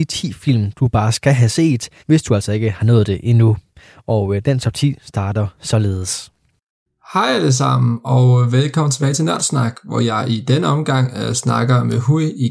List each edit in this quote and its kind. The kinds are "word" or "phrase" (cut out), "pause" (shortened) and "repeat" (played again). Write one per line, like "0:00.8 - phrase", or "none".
0:02.0 - pause